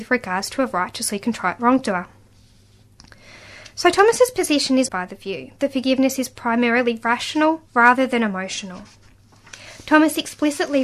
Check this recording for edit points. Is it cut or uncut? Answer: cut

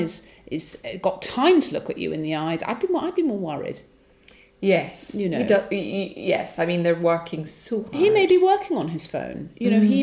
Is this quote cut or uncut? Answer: uncut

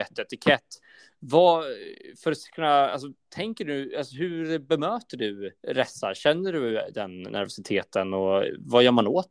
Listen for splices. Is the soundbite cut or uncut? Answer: cut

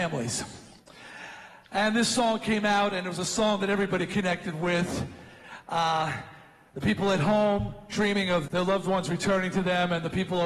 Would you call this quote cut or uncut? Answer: cut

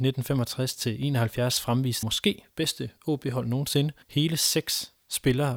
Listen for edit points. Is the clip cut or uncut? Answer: cut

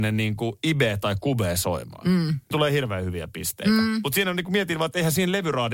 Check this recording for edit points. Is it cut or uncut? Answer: cut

